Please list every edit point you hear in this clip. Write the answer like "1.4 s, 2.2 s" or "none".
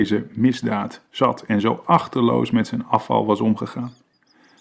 1.1 s